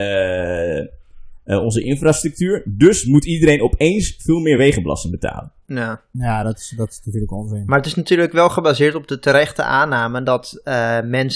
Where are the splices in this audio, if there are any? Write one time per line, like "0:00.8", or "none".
none